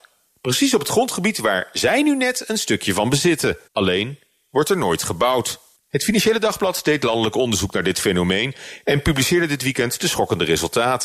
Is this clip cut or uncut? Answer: cut